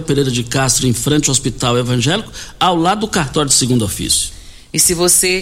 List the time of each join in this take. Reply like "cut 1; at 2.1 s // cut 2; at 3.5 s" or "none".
none